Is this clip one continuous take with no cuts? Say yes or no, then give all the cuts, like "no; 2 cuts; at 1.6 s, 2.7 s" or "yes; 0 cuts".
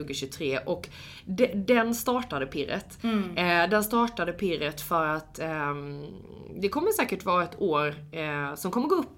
yes; 0 cuts